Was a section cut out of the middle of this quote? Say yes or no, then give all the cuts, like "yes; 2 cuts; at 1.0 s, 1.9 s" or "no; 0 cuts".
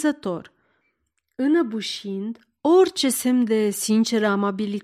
no; 0 cuts